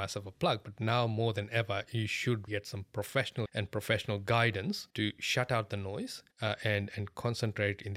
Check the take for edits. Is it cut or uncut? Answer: cut